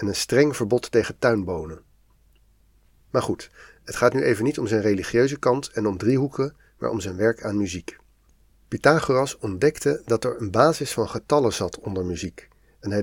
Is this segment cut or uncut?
uncut